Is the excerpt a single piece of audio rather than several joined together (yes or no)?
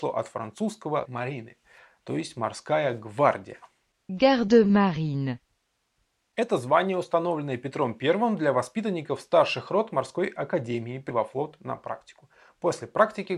no